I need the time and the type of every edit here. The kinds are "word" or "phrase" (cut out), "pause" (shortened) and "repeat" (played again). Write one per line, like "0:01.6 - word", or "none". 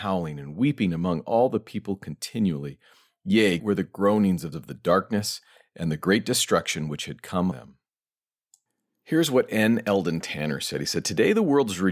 0:03.6 - word
0:04.5 - phrase
0:07.5 - word